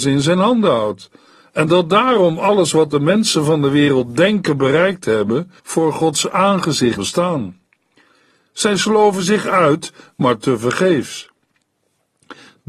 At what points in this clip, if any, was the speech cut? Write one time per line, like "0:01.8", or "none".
0:05.6
0:07.0

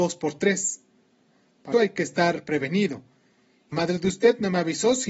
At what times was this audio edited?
0:01.7
0:03.7

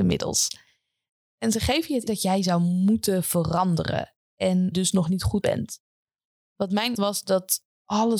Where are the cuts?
0:02.1
0:04.7
0:05.4
0:06.9

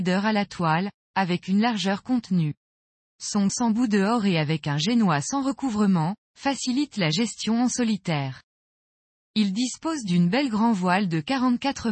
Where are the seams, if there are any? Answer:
0:03.5

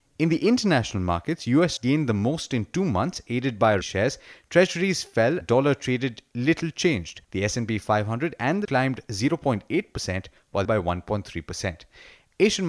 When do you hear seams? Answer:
0:01.8
0:03.8
0:05.4
0:07.2
0:08.6
0:10.6

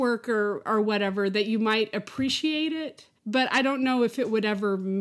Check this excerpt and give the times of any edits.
0:03.2

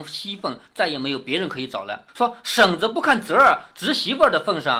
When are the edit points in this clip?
0:02.1

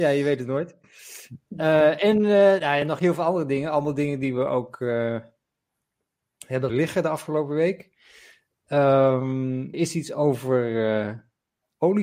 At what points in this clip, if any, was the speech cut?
0:06.7
0:09.7

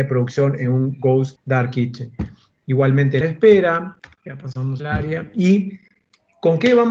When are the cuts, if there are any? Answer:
0:01.4
0:03.2
0:04.8

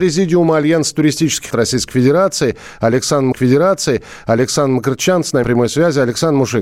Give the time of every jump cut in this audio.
0:01.5
0:03.3
0:05.4

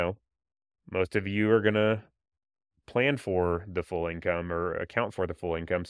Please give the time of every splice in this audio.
none

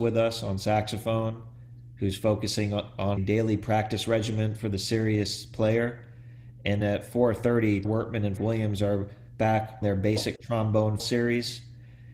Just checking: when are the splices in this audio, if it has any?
0:03.2
0:06.8
0:07.8
0:08.4
0:09.8
0:11.0

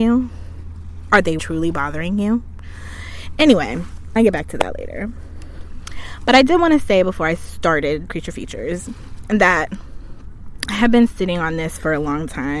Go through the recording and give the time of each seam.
0:01.4
0:04.2
0:08.1

